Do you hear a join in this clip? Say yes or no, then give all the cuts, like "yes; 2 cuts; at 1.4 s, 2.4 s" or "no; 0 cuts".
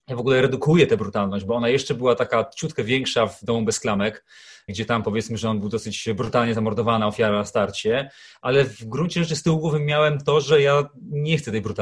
no; 0 cuts